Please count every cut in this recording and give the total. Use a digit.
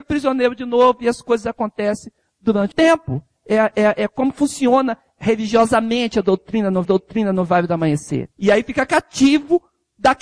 3